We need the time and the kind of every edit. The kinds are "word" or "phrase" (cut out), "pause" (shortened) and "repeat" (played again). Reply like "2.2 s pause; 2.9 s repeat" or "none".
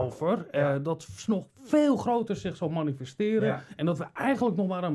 none